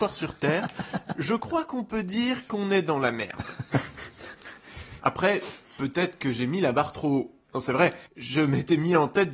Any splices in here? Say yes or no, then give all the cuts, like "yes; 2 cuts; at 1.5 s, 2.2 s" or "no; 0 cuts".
yes; 2 cuts; at 7.4 s, 8.1 s